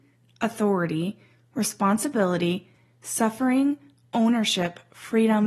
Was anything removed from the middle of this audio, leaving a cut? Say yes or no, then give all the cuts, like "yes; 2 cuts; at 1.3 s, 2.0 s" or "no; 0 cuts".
no; 0 cuts